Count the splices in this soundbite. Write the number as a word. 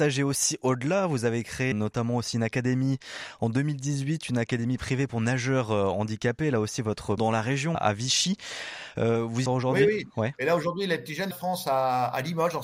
five